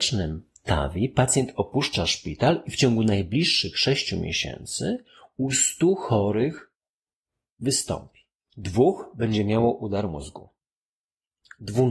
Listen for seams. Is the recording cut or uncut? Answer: uncut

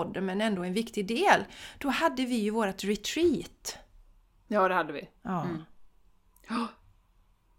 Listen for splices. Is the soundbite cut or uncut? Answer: uncut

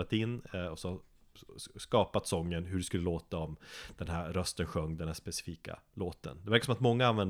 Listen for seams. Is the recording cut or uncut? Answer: uncut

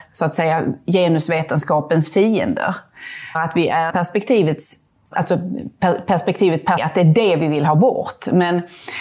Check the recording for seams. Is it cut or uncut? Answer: cut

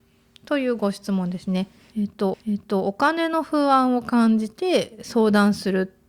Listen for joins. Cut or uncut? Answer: cut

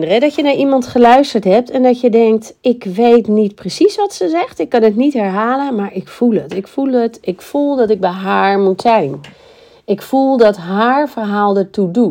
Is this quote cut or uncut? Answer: uncut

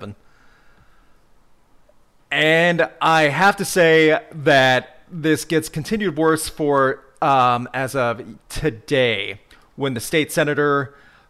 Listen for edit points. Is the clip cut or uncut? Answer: uncut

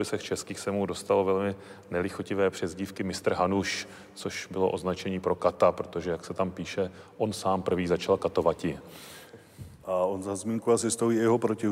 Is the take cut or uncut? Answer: uncut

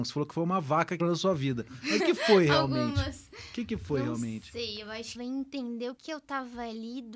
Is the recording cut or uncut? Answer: cut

